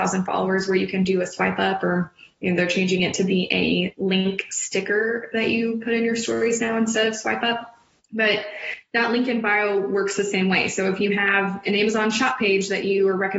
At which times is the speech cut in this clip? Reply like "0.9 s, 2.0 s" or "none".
8.0 s